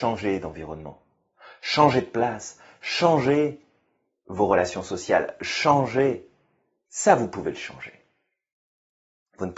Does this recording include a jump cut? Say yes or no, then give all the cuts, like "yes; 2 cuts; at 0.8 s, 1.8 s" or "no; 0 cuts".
no; 0 cuts